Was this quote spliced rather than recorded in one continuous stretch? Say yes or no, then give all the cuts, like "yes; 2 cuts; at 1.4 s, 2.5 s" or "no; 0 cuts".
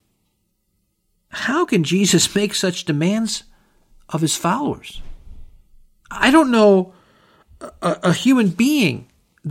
no; 0 cuts